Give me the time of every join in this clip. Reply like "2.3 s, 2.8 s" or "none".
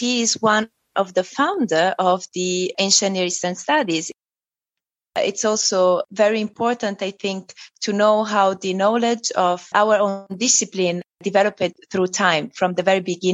none